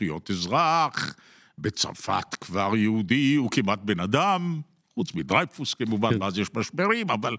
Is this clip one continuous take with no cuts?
yes; 0 cuts

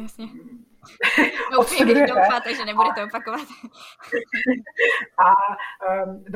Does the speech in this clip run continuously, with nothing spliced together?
yes; 0 cuts

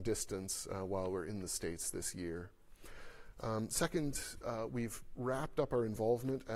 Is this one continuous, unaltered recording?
yes; 0 cuts

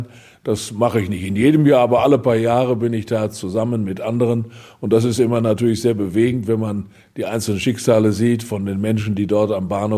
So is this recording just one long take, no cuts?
yes; 0 cuts

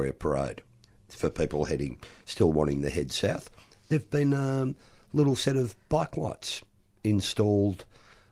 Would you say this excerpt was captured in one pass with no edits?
yes; 0 cuts

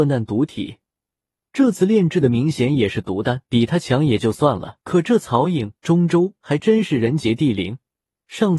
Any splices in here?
yes; 3 cuts; at 3.5 s, 4.8 s, 5.8 s

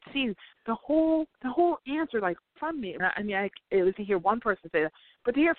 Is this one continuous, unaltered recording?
no; 4 cuts; at 1.3 s, 2.6 s, 3.0 s, 3.9 s

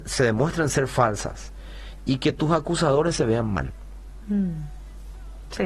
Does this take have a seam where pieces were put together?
no; 0 cuts

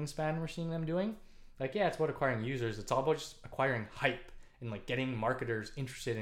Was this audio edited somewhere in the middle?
no; 0 cuts

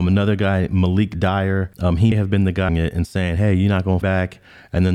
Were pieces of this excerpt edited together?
yes; 4 cuts; at 1.7 s, 2.1 s, 2.7 s, 4.0 s

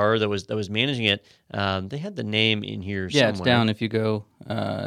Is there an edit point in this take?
no; 0 cuts

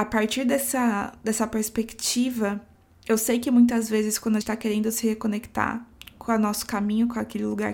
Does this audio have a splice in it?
yes; 3 cuts; at 2.7 s, 4.4 s, 5.9 s

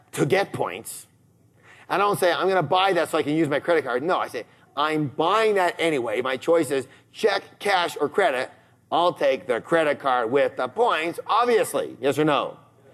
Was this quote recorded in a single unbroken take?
yes; 0 cuts

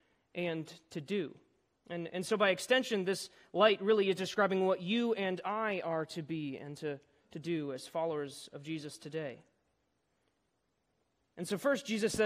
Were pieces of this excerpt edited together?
no; 0 cuts

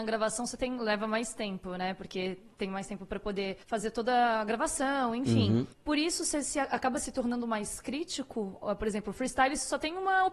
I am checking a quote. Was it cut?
yes; 2 cuts; at 3.6 s, 5.7 s

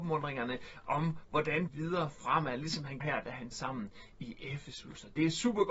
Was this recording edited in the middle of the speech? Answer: yes; 3 cuts; at 1.7 s, 3.0 s, 3.5 s

